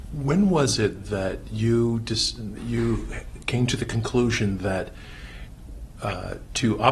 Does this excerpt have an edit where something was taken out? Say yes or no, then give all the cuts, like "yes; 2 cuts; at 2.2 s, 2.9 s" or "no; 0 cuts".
no; 0 cuts